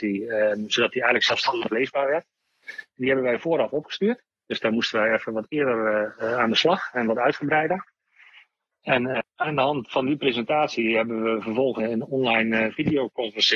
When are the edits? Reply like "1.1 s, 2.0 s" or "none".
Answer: 9.2 s, 11.8 s